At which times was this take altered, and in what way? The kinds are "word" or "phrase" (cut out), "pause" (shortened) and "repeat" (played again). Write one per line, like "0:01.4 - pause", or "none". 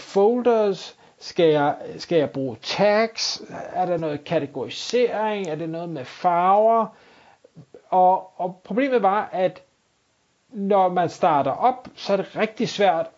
none